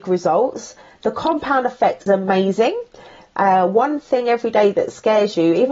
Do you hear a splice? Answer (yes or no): yes